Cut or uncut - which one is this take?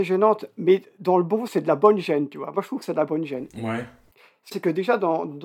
cut